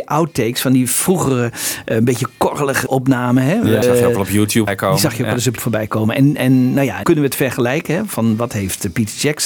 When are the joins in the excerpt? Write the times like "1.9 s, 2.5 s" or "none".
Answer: 2.9 s, 3.8 s, 4.7 s, 5.6 s, 7.0 s